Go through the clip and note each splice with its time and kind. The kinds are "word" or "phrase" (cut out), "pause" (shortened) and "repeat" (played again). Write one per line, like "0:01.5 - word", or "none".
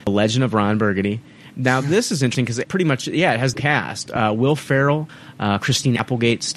0:02.6 - phrase
0:03.5 - phrase